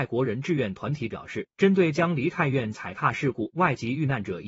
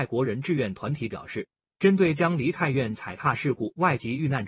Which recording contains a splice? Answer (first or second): first